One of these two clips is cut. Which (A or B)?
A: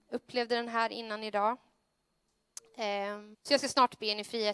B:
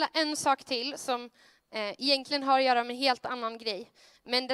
A